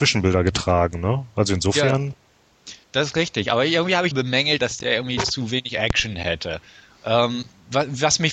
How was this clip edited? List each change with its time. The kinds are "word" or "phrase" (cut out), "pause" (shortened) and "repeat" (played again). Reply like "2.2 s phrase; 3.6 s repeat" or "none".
2.8 s pause; 4.1 s phrase; 4.6 s word